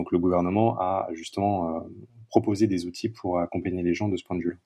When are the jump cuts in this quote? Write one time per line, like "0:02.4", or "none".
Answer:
none